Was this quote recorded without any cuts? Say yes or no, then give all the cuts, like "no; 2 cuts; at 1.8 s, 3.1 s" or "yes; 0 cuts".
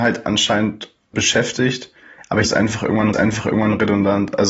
no; 3 cuts; at 1.1 s, 2.4 s, 3.1 s